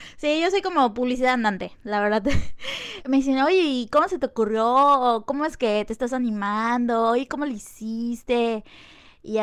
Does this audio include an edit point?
yes; 1 cut; at 3.0 s

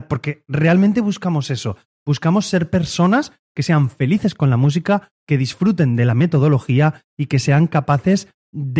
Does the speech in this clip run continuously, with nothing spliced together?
yes; 0 cuts

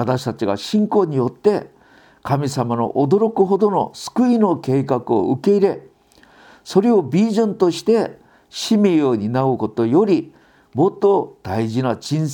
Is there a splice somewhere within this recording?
no; 0 cuts

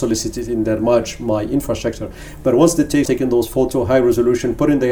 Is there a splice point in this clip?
yes; 1 cut; at 3.1 s

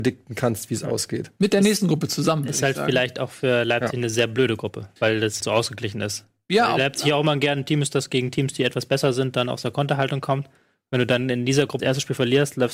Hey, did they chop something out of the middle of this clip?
yes; 3 cuts; at 5.0 s, 5.4 s, 11.8 s

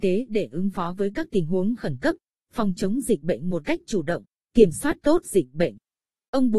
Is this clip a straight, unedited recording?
yes; 0 cuts

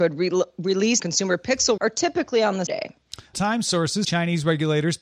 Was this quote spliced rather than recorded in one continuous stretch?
yes; 5 cuts; at 1.0 s, 1.8 s, 2.7 s, 3.3 s, 4.0 s

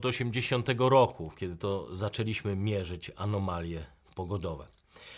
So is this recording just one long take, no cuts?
yes; 0 cuts

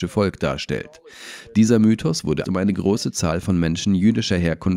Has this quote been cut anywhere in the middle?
yes; 1 cut; at 2.4 s

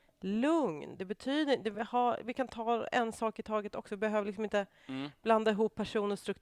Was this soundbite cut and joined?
no; 0 cuts

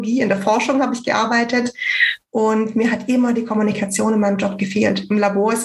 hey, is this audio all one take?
yes; 0 cuts

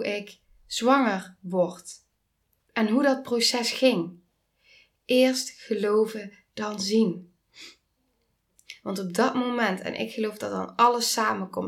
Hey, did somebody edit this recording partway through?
no; 0 cuts

